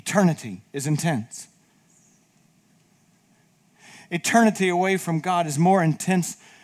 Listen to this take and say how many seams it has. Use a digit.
0